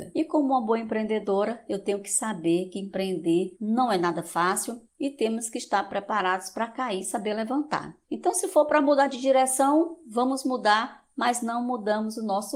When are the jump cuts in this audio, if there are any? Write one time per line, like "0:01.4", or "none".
0:03.5
0:04.9
0:08.0

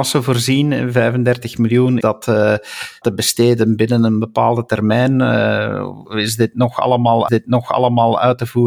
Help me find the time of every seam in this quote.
0:02.0
0:03.0
0:06.0
0:07.3

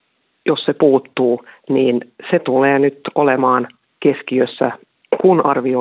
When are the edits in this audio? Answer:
none

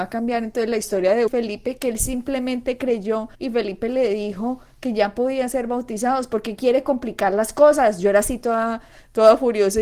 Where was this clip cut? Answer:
0:01.3
0:03.3

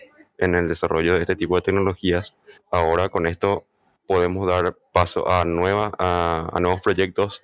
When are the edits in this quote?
0:02.6

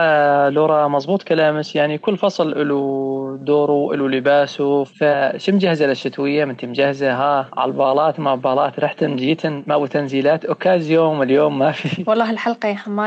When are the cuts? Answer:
none

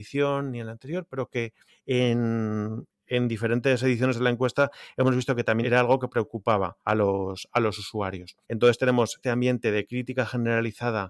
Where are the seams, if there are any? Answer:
0:01.7
0:05.6
0:06.8
0:08.4
0:09.2

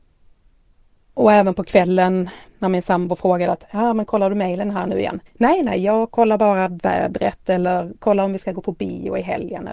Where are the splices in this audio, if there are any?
0:05.3

